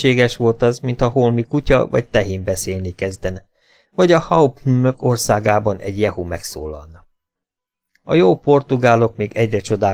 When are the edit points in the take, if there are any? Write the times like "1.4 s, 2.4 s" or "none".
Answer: none